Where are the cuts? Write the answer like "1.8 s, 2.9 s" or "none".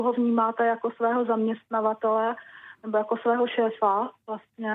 none